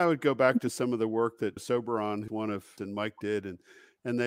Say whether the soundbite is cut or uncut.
cut